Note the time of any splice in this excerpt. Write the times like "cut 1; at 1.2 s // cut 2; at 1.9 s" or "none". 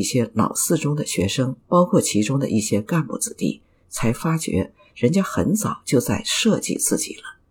cut 1; at 1.6 s